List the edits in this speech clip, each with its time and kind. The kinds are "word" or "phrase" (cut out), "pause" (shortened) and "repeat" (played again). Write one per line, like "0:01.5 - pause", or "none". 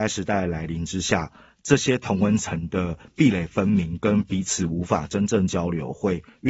none